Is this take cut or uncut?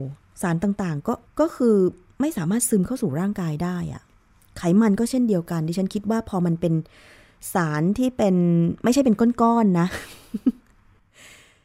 cut